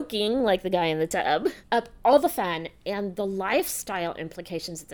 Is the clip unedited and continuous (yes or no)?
yes